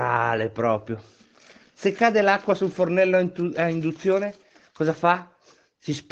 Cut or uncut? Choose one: uncut